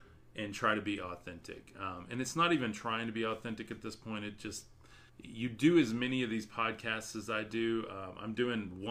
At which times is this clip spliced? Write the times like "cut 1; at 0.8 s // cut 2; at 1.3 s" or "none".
cut 1; at 5.1 s